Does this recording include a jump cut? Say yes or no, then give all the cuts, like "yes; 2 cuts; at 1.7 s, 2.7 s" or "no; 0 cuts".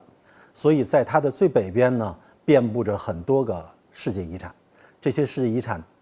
no; 0 cuts